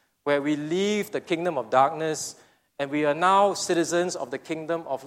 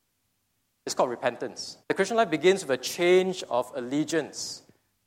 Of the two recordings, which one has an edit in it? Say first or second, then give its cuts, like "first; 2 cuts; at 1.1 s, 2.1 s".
second; 1 cut; at 1.8 s